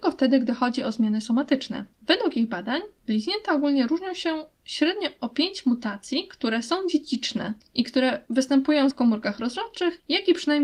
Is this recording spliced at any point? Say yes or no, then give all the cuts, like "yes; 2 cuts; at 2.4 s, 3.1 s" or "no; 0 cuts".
yes; 3 cuts; at 1.9 s, 7.6 s, 8.9 s